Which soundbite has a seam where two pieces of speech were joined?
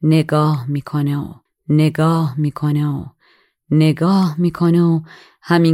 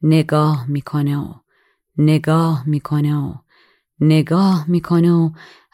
first; 1 cut; at 1.5 s

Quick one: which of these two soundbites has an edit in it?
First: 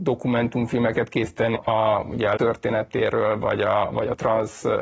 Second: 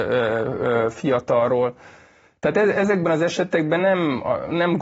first; 2 cuts; at 1.5 s, 2.4 s

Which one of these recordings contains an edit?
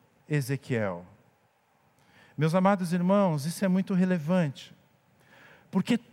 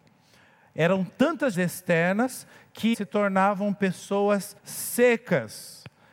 second; 3 cuts; at 1.5 s, 2.9 s, 4.6 s

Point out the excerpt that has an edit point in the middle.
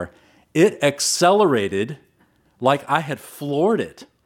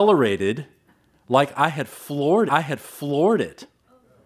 second; 1 cut; at 2.5 s

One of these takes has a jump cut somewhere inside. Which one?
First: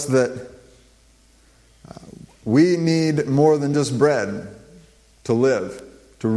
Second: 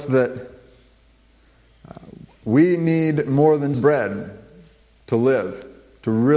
second; 1 cut; at 3.7 s

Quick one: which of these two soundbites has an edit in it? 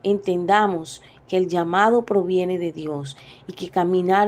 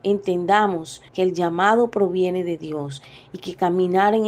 second; 1 cut; at 1.1 s

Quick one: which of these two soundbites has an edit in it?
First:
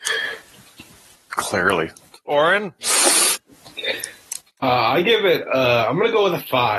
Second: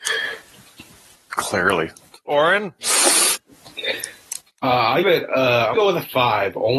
second; 2 cuts; at 5.0 s, 5.7 s

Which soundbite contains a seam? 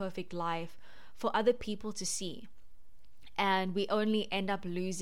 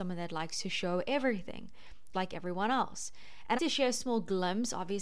second; 2 cuts; at 2.1 s, 3.6 s

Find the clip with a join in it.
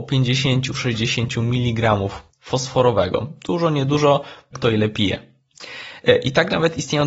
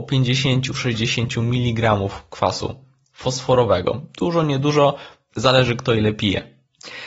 first; 2 cuts; at 2.3 s, 4.5 s

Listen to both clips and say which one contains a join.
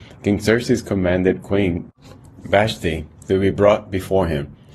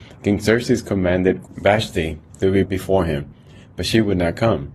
second; 2 cuts; at 1.4 s, 2.6 s

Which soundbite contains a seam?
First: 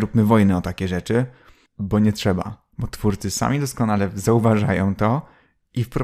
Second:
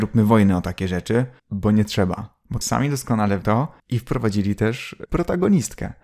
second; 5 cuts; at 1.4 s, 2.6 s, 3.4 s, 3.8 s, 5.1 s

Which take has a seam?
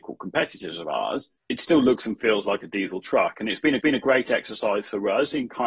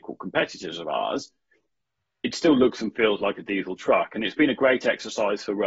first; 2 cuts; at 1.4 s, 3.8 s

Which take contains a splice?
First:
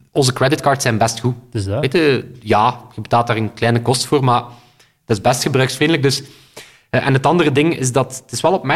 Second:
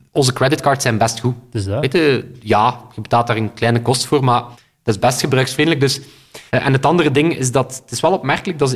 second; 2 cuts; at 4.5 s, 6.5 s

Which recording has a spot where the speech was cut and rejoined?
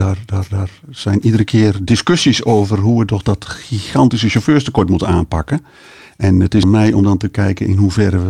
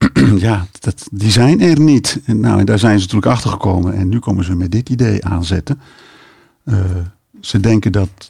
first; 1 cut; at 6.6 s

